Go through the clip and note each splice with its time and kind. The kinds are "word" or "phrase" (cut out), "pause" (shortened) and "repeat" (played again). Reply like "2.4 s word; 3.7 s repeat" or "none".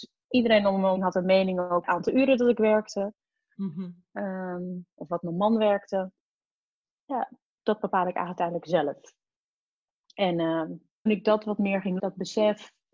1.0 s word; 1.8 s word; 7.6 s word; 11.1 s word; 12.0 s word